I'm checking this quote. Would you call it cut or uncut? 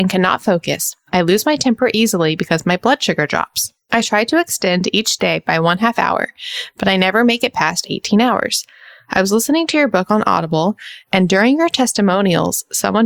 uncut